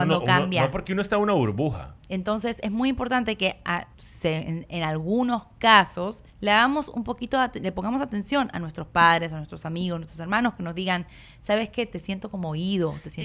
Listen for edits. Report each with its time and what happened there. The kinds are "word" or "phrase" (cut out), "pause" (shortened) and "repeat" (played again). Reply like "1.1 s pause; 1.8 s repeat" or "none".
3.9 s pause; 6.3 s pause

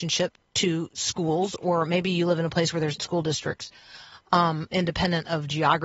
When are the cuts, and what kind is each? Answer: 3.0 s word

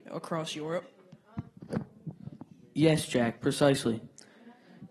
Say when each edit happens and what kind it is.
none

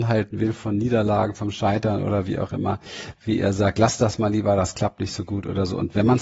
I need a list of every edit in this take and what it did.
none

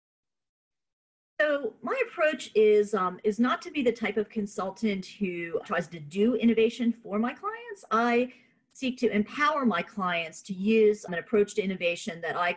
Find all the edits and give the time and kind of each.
5.6 s word; 11.1 s word

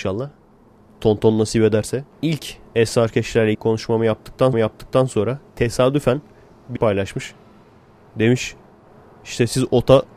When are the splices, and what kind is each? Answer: 2.1 s pause; 3.5 s word; 4.5 s repeat; 6.8 s phrase

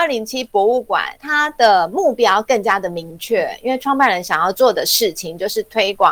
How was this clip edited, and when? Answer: 1.2 s word

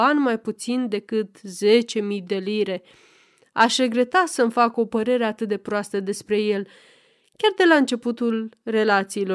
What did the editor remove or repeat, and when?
none

